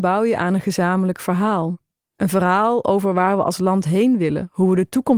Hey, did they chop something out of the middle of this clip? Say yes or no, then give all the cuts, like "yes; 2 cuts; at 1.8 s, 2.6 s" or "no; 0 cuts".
no; 0 cuts